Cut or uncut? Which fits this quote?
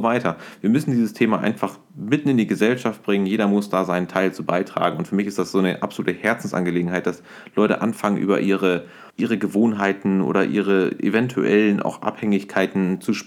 cut